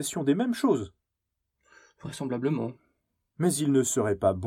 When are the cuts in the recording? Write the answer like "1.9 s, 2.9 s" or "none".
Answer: none